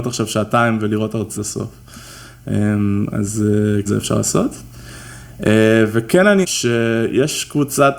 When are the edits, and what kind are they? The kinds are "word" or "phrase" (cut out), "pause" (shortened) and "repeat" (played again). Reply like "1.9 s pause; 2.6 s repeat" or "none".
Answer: 1.4 s phrase; 3.9 s phrase; 6.4 s phrase

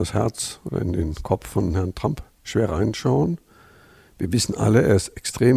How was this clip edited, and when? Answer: none

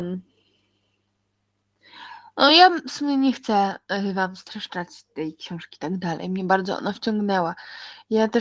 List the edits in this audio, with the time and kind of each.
none

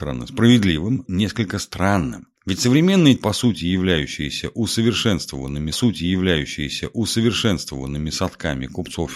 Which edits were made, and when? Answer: 1.1 s phrase; 2.4 s pause; 3.2 s word; 5.7 s repeat

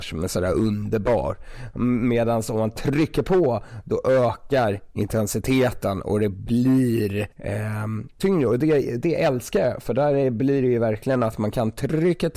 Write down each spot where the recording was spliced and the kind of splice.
7.3 s pause

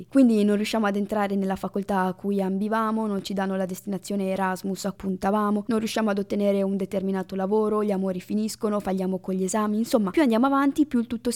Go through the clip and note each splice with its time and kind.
4.9 s word

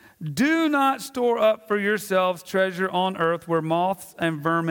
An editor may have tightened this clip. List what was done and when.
none

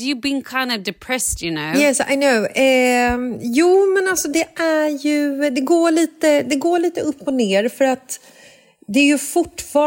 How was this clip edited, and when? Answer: none

